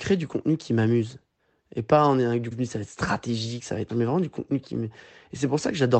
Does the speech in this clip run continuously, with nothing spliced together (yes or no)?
no